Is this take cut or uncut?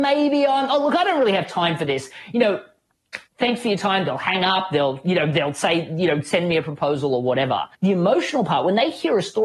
cut